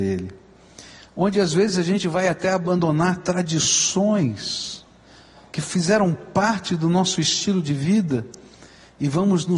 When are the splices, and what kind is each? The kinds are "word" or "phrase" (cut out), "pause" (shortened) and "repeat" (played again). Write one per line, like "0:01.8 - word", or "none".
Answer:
none